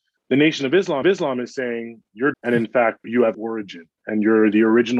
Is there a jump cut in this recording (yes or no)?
yes